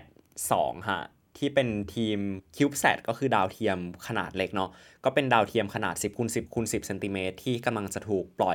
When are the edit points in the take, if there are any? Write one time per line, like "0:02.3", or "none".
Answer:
none